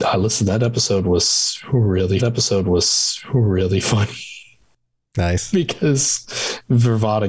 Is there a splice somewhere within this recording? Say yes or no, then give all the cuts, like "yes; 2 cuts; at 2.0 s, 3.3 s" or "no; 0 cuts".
yes; 1 cut; at 2.2 s